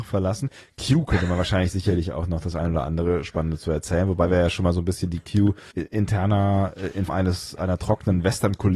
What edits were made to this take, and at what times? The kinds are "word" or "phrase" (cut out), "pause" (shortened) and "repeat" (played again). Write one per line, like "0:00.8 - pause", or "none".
0:05.7 - word
0:07.1 - word